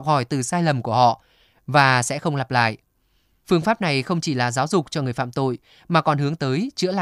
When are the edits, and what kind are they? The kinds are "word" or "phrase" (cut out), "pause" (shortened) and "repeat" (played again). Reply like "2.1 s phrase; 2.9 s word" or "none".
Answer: none